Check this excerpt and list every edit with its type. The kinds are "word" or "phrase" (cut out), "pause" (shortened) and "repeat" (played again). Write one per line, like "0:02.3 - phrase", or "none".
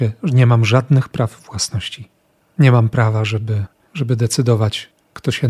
none